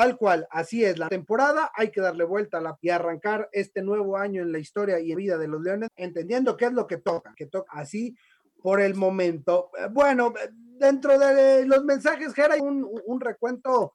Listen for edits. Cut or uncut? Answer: cut